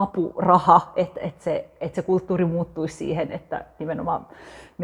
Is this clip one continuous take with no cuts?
yes; 0 cuts

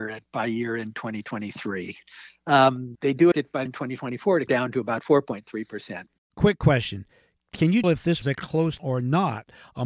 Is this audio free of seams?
no; 7 cuts; at 3.0 s, 3.3 s, 3.7 s, 4.5 s, 7.8 s, 8.2 s, 8.8 s

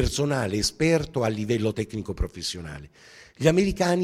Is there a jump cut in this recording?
yes; 1 cut; at 1.7 s

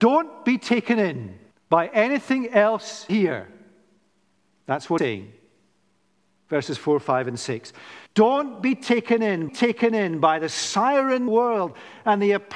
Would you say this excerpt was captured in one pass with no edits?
no; 6 cuts; at 1.5 s, 3.1 s, 5.0 s, 8.1 s, 9.5 s, 11.3 s

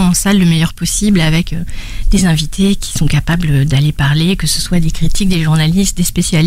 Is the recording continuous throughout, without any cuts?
yes; 0 cuts

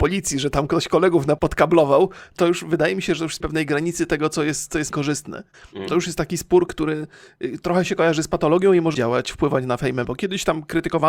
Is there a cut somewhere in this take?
yes; 8 cuts; at 1.4 s, 2.4 s, 3.4 s, 4.9 s, 5.9 s, 6.7 s, 8.9 s, 10.0 s

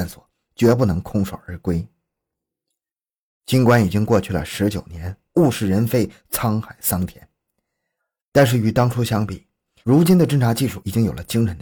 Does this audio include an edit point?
no; 0 cuts

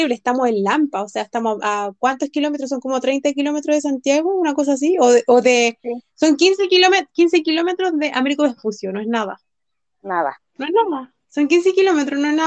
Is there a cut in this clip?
yes; 1 cut; at 10.5 s

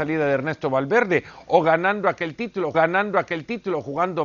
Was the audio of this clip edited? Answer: yes; 1 cut; at 2.7 s

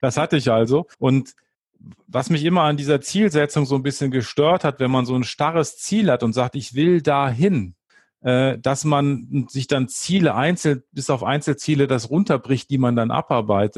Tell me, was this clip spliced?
yes; 2 cuts; at 0.9 s, 7.9 s

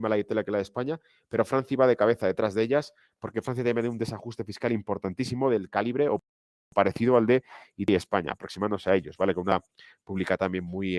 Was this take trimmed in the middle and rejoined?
no; 0 cuts

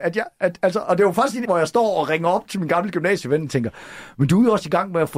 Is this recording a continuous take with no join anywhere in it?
no; 1 cut; at 1.4 s

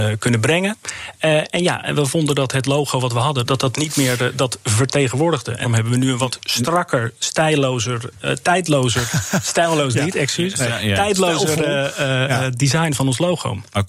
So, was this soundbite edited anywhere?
yes; 2 cuts; at 3.4 s, 5.6 s

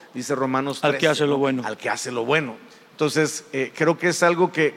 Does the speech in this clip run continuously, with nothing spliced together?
yes; 0 cuts

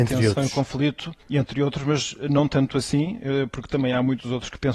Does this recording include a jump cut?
yes; 1 cut; at 1.2 s

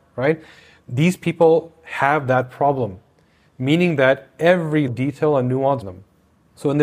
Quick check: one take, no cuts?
no; 2 cuts; at 4.9 s, 5.8 s

